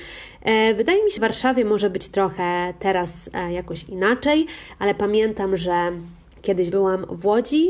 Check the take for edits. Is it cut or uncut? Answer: cut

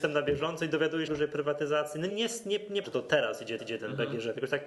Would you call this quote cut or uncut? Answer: cut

